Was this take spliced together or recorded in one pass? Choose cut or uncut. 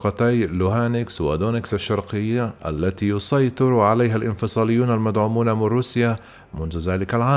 uncut